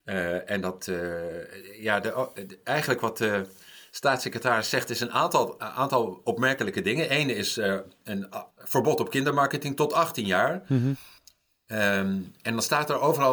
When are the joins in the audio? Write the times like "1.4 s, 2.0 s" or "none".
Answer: 8.5 s